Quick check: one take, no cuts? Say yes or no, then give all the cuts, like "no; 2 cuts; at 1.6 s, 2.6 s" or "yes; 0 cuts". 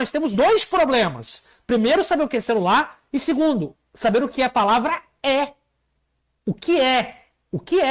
yes; 0 cuts